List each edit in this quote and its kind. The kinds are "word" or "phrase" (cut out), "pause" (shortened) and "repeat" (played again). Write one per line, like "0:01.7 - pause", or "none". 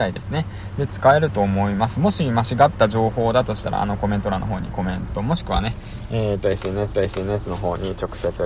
0:06.9 - repeat